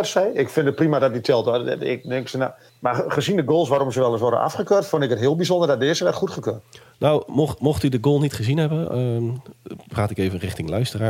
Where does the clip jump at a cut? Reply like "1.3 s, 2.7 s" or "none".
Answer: 2.7 s